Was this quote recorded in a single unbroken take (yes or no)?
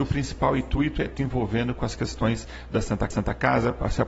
no